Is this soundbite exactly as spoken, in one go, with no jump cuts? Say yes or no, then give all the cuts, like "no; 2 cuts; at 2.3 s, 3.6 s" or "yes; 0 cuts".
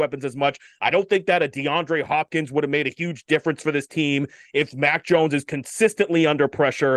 yes; 0 cuts